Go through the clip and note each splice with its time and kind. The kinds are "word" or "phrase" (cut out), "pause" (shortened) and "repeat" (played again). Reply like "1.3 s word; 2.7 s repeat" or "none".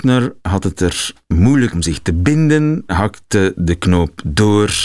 1.7 s word; 2.9 s word